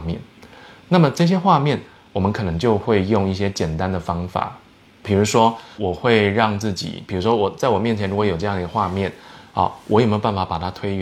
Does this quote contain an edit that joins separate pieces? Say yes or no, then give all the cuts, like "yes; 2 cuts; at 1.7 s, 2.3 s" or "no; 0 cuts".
yes; 2 cuts; at 5.0 s, 5.8 s